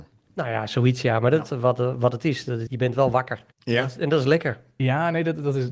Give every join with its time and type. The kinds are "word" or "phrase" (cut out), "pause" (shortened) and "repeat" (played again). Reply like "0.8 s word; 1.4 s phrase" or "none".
1.5 s word; 2.7 s word; 3.5 s pause